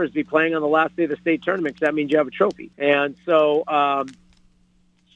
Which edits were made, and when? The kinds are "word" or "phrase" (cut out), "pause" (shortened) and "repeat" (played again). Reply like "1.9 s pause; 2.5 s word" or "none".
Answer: 2.7 s pause